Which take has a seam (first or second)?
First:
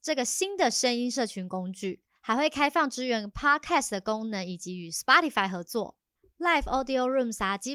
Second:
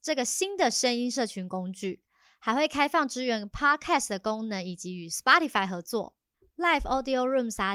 first